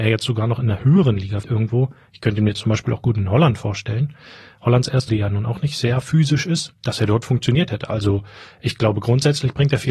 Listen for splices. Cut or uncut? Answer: cut